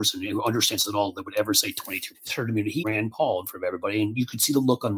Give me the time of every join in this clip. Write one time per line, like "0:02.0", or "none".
0:02.1
0:02.8